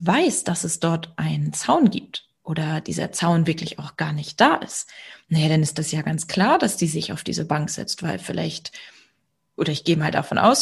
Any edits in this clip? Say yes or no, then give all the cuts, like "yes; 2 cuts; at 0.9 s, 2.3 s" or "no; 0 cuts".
no; 0 cuts